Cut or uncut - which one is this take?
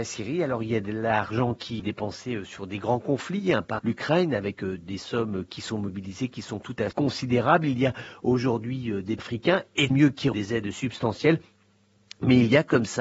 cut